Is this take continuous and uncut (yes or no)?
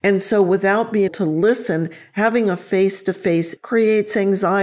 no